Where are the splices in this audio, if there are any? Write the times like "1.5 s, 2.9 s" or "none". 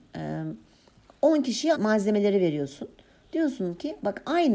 1.7 s

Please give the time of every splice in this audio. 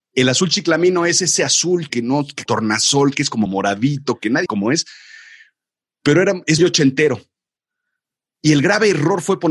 1.9 s, 2.5 s, 3.5 s, 4.5 s, 6.6 s

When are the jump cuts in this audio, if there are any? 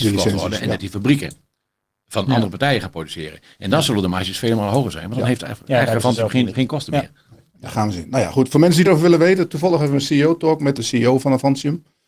8.9 s, 10.8 s

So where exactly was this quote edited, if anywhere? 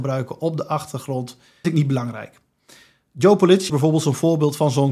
1.6 s, 3.7 s

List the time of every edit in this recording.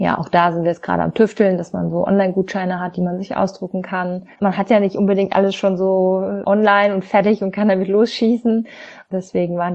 4.3 s

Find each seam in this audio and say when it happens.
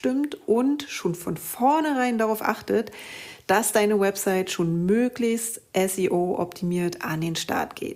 none

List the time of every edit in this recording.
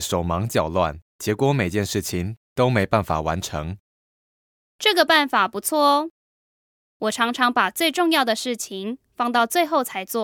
1.1 s

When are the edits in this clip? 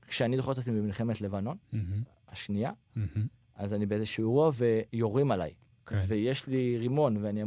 1.6 s, 4.9 s, 5.7 s

